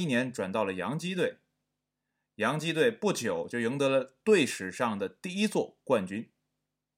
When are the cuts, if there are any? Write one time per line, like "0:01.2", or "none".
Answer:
none

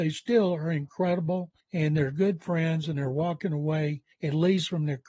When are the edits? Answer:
0:01.6
0:04.1

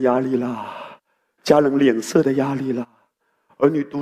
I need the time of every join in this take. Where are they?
none

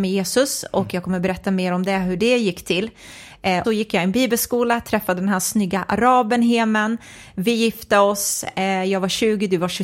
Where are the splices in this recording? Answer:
0:03.6

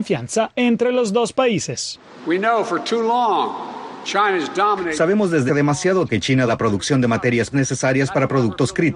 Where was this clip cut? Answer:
0:05.5
0:06.1
0:06.5
0:07.5

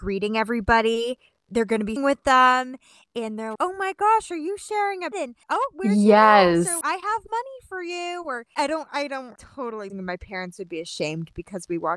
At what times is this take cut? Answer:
0:01.5
0:02.0
0:03.6
0:05.1
0:05.4
0:06.8
0:08.6
0:09.4
0:09.9

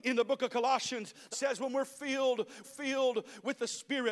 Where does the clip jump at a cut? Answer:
0:01.3
0:02.6

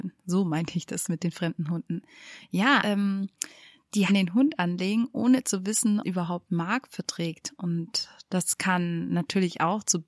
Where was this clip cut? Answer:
0:02.8
0:04.1
0:06.0

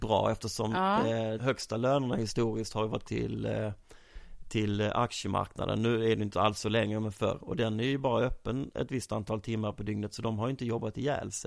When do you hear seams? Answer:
0:01.4
0:03.0

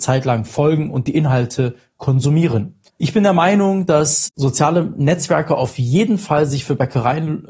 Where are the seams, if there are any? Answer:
0:02.9

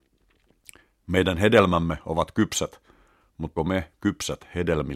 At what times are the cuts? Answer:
0:03.6

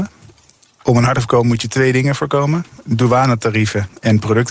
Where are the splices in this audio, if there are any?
0:01.1

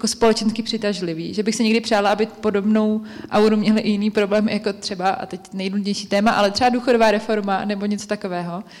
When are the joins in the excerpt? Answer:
none

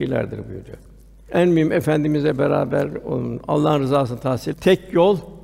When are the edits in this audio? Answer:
0:04.5

